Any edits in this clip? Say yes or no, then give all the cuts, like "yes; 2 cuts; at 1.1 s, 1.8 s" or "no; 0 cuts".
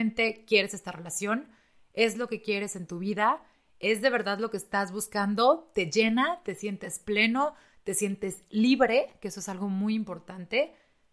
no; 0 cuts